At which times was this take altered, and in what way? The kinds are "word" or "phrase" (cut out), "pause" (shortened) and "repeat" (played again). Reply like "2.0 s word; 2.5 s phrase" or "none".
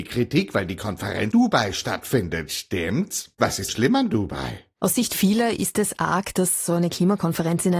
1.3 s word; 3.3 s pause; 3.7 s word